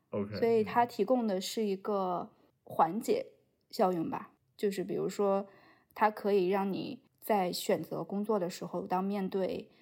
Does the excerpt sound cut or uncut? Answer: uncut